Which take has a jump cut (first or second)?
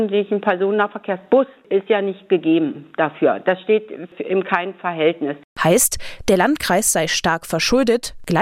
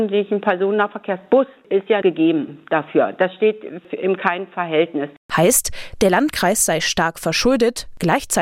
second